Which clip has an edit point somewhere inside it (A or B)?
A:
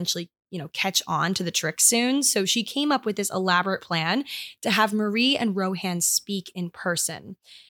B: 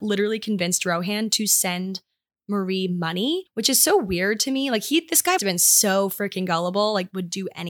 B